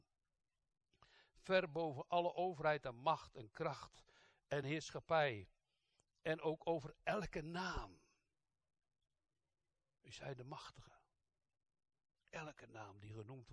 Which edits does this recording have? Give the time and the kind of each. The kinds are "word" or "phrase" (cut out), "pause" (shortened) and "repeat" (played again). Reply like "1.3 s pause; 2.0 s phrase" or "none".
none